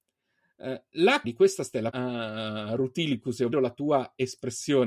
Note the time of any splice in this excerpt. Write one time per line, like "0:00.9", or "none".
0:01.2
0:01.9
0:03.5